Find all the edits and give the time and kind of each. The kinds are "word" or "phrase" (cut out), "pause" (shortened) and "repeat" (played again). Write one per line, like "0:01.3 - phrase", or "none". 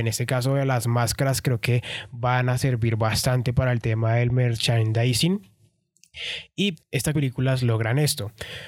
0:06.7 - word
0:07.1 - phrase